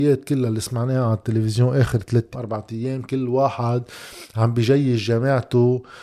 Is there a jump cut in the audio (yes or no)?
yes